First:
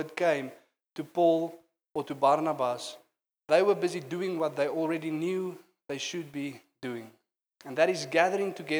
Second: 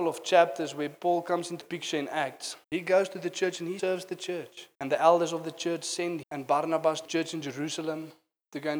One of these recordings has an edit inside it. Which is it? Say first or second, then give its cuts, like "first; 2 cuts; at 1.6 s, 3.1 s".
second; 6 cuts; at 1.6 s, 2.6 s, 3.8 s, 4.7 s, 6.2 s, 7.0 s